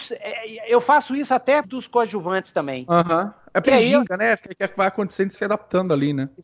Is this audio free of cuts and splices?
no; 3 cuts; at 1.6 s, 3.6 s, 5.4 s

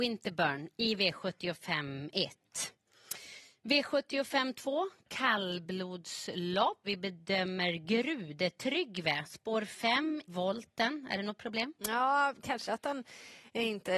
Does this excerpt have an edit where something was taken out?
yes; 3 cuts; at 6.8 s, 10.3 s, 12.7 s

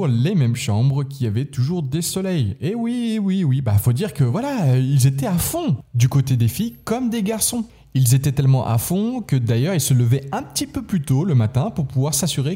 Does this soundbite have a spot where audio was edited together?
no; 0 cuts

